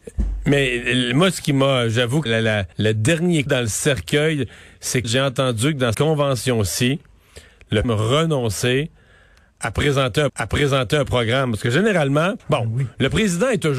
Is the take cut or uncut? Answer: cut